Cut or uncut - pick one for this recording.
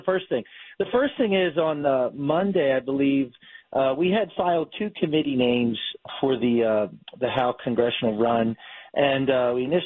uncut